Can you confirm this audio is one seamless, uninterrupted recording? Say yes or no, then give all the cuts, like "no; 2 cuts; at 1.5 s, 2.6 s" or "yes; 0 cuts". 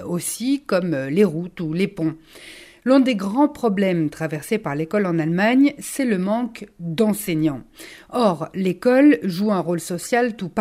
yes; 0 cuts